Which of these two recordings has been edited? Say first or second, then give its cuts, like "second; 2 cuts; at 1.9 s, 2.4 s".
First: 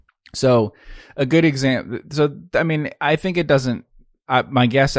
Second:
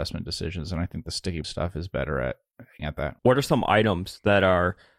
second; 3 cuts; at 1.4 s, 2.8 s, 3.2 s